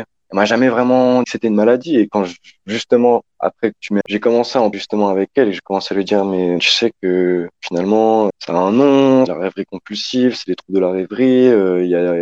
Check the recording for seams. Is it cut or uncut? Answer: cut